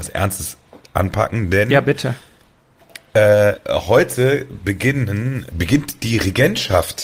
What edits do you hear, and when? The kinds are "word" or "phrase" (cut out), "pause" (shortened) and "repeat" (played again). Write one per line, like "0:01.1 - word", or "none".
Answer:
0:05.5 - word